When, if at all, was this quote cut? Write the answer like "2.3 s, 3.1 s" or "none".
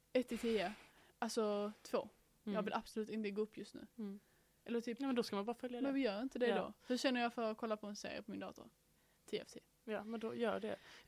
none